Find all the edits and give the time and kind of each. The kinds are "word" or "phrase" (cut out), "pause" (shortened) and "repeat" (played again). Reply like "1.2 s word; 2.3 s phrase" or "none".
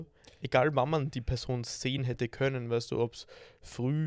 none